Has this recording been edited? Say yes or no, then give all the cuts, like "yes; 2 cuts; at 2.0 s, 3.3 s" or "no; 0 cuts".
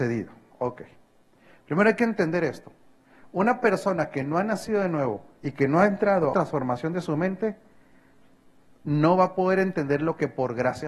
yes; 1 cut; at 6.3 s